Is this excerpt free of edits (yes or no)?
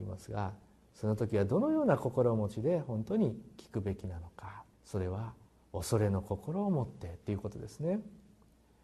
no